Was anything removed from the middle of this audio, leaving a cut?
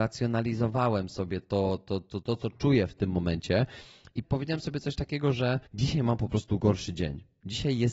yes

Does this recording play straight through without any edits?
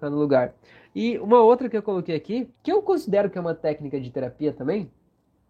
no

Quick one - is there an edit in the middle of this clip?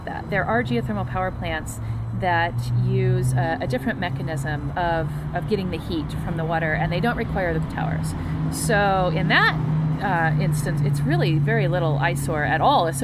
yes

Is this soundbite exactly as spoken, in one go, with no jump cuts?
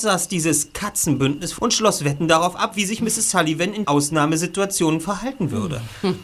no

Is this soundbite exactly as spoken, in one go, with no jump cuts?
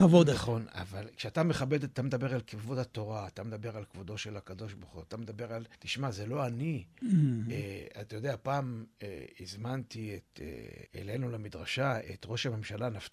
no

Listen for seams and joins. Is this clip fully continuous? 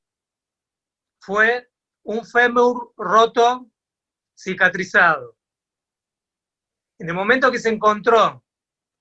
yes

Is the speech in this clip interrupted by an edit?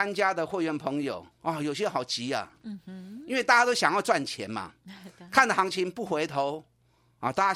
yes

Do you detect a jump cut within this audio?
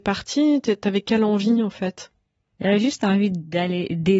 no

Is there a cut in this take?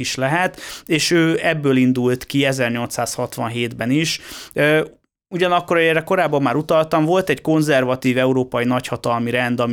no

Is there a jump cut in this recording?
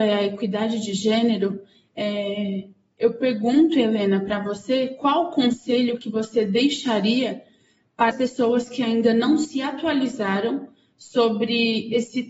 yes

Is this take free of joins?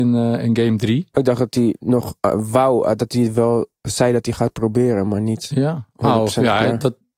no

